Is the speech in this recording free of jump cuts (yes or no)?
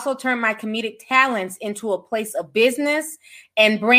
yes